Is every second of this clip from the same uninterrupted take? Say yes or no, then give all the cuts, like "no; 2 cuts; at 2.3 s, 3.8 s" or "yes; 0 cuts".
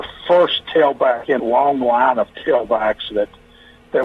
no; 1 cut; at 1.4 s